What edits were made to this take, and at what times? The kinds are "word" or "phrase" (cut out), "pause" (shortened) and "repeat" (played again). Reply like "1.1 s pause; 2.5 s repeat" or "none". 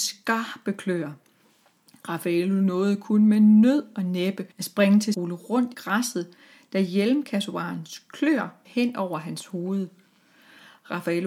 4.5 s pause; 5.1 s phrase; 5.7 s word; 8.6 s word